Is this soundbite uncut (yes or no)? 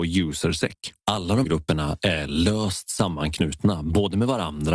no